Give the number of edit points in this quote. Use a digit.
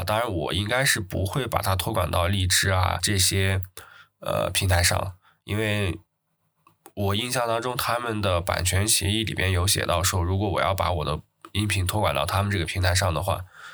0